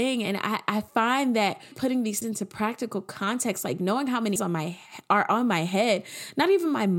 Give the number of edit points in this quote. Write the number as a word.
three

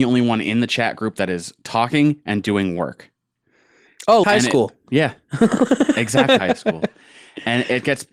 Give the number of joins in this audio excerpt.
two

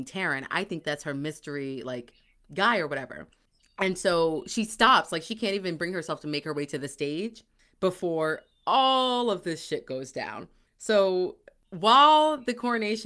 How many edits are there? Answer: zero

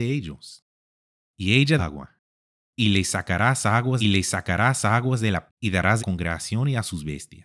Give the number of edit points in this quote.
four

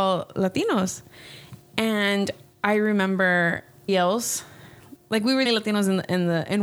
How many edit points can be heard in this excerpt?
two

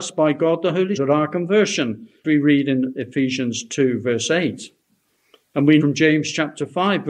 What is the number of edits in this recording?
three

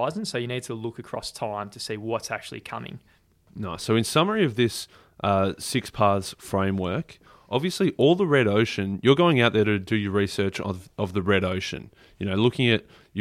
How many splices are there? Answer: zero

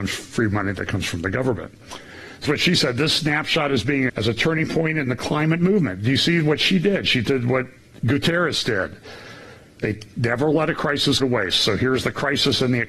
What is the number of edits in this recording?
three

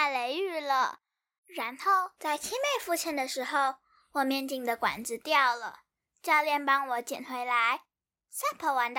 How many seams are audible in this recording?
zero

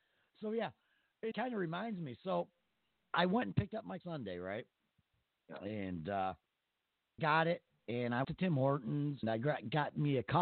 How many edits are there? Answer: six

